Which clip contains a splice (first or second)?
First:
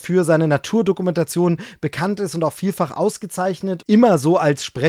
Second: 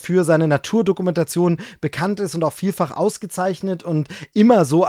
first